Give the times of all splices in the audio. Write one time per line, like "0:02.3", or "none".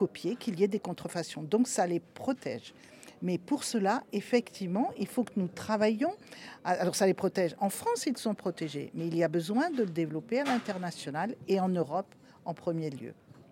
none